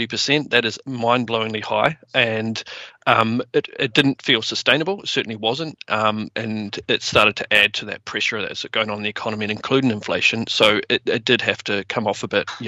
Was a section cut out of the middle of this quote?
no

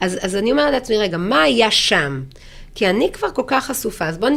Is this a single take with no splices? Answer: yes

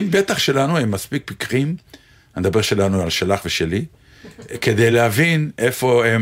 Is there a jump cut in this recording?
no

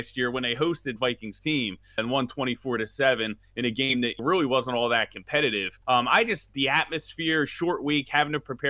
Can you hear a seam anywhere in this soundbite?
yes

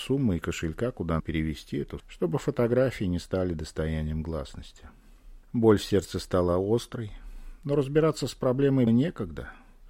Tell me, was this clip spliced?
yes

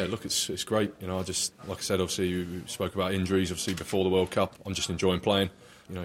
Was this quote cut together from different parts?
no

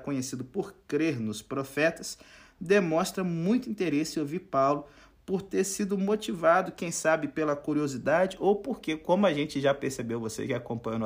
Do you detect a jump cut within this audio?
no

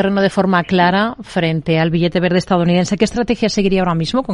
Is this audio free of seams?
yes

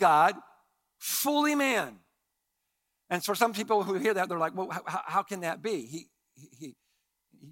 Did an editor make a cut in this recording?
no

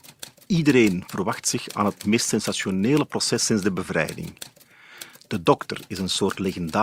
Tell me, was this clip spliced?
no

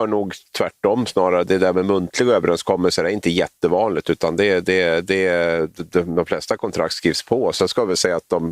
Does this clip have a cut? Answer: no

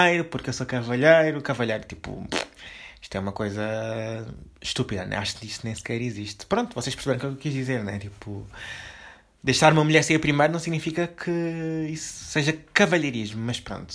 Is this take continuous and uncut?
yes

